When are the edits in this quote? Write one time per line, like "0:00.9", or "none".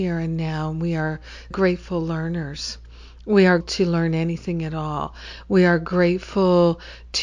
0:01.5
0:03.6